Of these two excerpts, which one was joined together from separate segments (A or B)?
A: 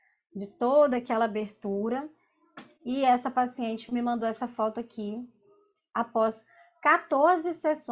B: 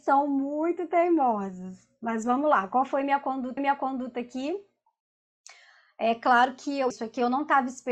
B